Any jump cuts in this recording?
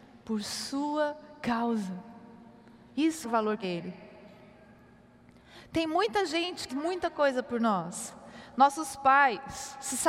yes; 3 cuts; at 3.2 s, 3.6 s, 6.7 s

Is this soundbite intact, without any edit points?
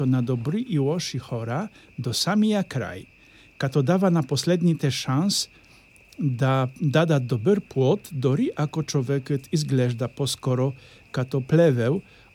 yes; 0 cuts

